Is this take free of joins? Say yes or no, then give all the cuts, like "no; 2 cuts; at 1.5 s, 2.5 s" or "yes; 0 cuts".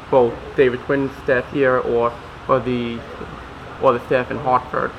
no; 1 cut; at 3.8 s